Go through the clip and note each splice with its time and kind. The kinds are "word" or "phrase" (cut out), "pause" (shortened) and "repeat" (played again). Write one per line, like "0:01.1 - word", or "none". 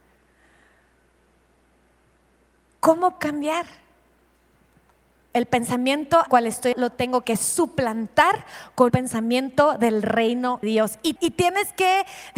0:03.2 - word
0:06.3 - word
0:06.7 - word
0:08.9 - word
0:10.6 - word
0:11.2 - word